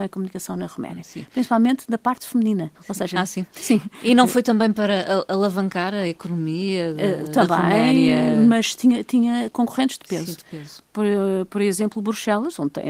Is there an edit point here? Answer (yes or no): yes